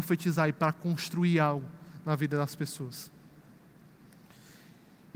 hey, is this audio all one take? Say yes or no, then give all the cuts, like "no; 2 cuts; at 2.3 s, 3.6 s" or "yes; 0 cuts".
yes; 0 cuts